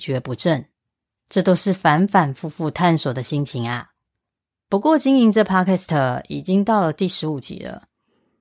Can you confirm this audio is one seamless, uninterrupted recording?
yes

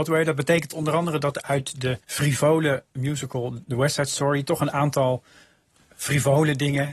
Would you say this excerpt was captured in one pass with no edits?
no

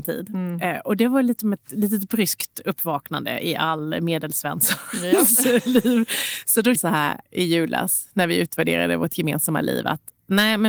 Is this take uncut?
no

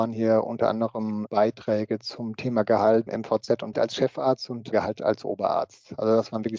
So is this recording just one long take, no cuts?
no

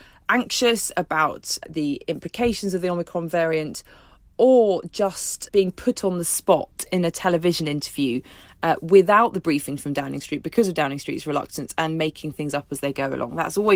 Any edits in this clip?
no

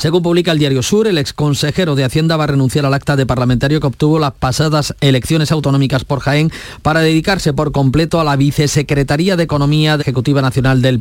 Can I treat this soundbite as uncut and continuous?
no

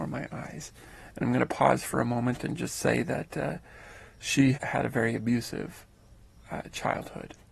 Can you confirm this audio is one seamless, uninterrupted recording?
no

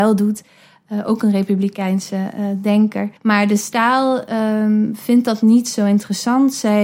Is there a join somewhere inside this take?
yes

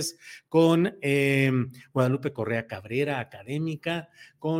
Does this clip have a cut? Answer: no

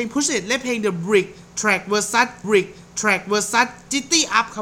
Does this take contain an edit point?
yes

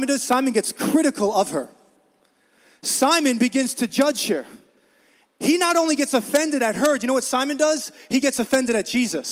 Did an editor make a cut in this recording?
no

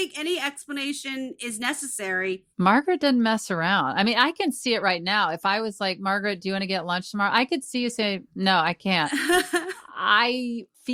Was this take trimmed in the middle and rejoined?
yes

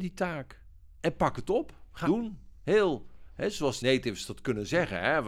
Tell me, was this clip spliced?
yes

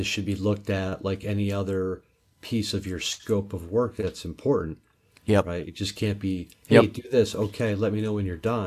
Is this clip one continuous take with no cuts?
yes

